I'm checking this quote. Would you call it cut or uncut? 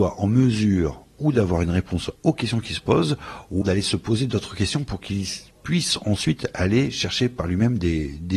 cut